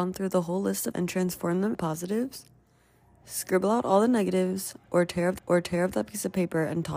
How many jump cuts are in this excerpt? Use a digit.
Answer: 3